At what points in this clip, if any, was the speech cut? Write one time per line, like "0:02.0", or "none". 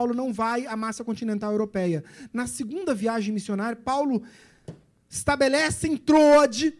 none